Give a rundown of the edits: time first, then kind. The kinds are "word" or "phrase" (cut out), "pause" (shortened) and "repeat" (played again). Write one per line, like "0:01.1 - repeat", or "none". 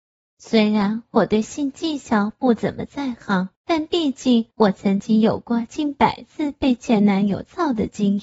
0:03.5 - pause
0:04.5 - pause